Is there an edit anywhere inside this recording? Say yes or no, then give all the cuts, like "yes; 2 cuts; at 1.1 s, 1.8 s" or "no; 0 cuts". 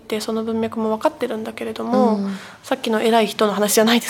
no; 0 cuts